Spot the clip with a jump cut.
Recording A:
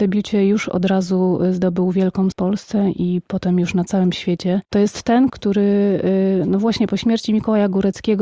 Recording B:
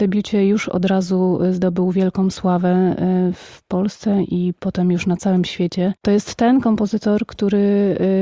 A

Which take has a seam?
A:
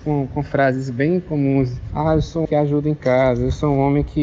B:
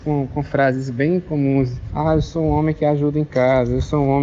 A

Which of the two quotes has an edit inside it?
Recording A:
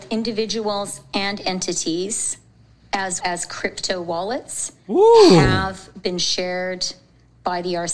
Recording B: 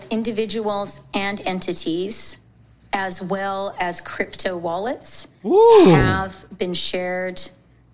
A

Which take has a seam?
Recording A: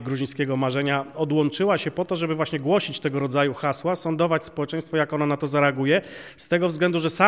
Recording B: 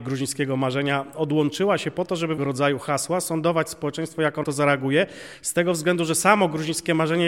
B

